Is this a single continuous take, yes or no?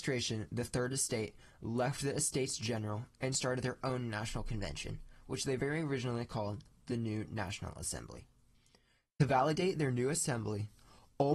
yes